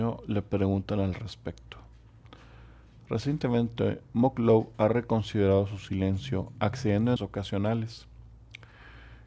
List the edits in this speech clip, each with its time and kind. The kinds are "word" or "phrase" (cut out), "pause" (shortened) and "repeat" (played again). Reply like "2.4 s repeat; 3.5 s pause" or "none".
7.2 s word